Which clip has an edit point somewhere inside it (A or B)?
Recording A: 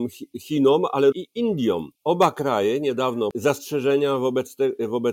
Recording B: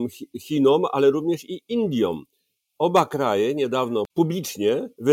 A